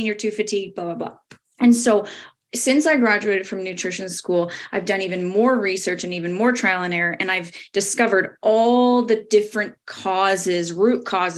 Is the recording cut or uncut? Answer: cut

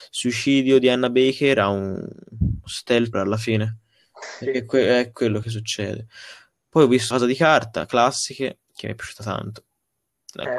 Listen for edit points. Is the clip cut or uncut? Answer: cut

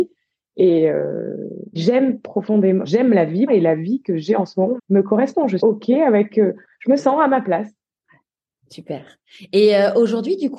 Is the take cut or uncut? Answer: cut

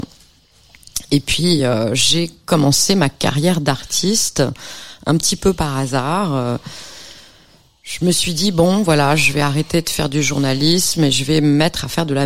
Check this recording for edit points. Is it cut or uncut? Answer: uncut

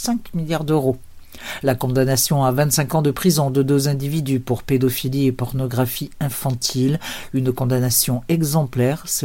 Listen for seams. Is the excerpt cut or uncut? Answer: uncut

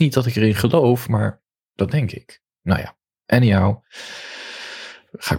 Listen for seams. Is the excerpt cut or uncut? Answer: uncut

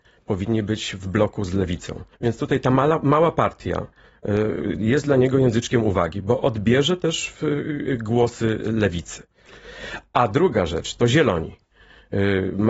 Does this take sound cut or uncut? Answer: cut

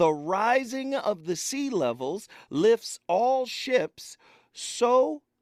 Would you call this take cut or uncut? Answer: uncut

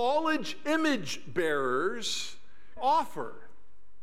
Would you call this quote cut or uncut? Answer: cut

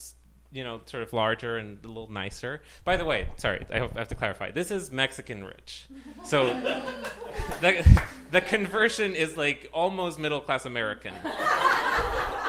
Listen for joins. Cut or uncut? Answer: uncut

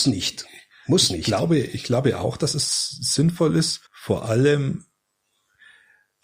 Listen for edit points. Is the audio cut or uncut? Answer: cut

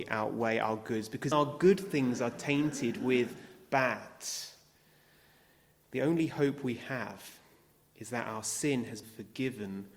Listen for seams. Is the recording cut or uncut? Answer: cut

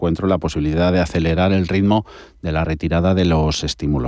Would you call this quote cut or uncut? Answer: uncut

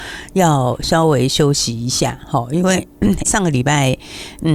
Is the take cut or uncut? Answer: cut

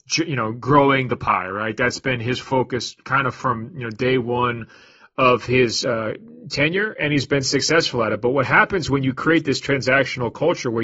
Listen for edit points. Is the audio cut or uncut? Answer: uncut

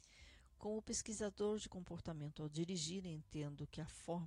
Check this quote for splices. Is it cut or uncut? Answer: uncut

